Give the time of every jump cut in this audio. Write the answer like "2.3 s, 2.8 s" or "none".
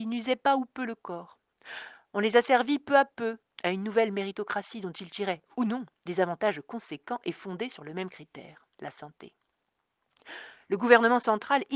3.4 s, 8.7 s